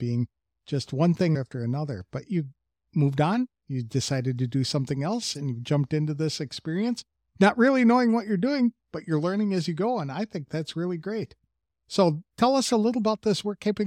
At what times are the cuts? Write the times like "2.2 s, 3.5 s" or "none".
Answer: none